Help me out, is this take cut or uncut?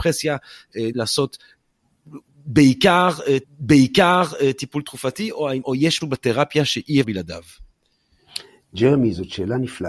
cut